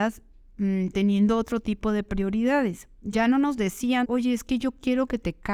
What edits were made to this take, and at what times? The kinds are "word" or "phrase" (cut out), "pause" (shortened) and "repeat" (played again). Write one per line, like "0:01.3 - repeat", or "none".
0:04.0 - phrase